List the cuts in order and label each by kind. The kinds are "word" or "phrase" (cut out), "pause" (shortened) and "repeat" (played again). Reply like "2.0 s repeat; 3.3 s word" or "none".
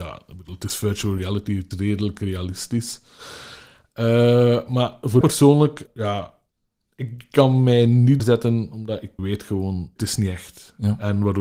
1.7 s word; 5.2 s word; 5.9 s word; 8.2 s word; 9.2 s word; 10.0 s word